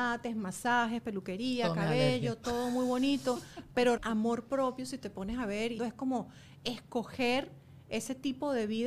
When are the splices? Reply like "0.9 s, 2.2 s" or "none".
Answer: 4.0 s, 5.8 s